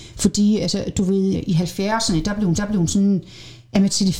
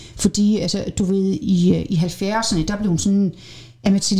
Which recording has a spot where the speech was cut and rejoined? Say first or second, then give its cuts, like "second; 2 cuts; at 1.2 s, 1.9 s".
first; 2 cuts; at 1.3 s, 2.6 s